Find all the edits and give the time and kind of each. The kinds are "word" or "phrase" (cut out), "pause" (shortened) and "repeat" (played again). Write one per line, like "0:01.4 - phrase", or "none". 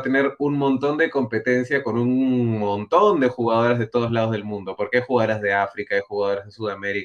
none